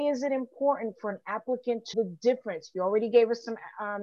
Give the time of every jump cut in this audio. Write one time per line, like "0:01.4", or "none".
0:01.9

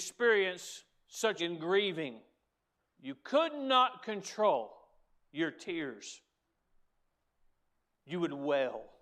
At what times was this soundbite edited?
0:01.4
0:02.8

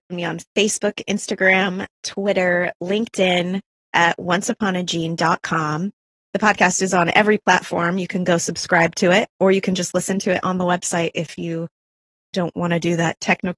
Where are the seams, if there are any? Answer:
none

